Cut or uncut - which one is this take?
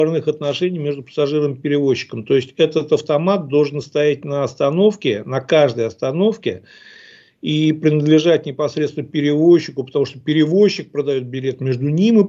uncut